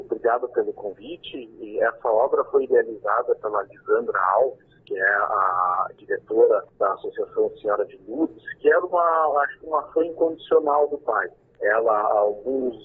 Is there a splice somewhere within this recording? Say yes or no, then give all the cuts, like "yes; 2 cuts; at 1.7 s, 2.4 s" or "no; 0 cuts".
yes; 2 cuts; at 6.7 s, 11.4 s